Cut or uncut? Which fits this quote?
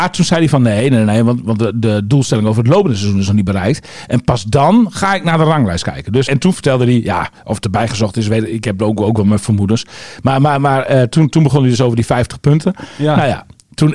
cut